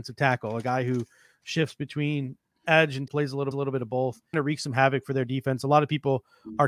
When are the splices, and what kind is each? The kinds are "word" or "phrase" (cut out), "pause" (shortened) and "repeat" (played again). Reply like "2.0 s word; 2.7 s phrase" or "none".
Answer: 3.1 s word; 3.5 s repeat; 4.3 s word